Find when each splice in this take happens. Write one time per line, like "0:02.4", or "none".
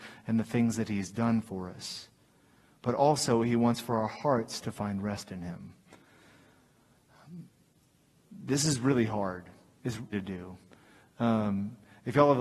0:10.1